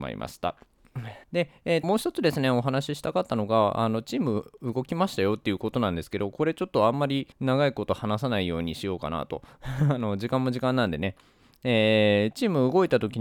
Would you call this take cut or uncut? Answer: cut